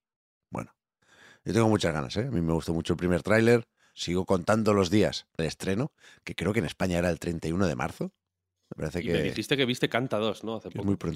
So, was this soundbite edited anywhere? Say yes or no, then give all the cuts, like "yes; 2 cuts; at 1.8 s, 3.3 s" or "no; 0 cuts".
yes; 1 cut; at 5.4 s